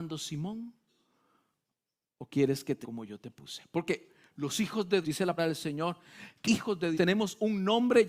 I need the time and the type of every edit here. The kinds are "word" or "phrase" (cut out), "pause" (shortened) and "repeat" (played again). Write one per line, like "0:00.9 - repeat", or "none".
0:02.8 - word
0:05.0 - word
0:05.4 - word
0:06.4 - word
0:06.9 - word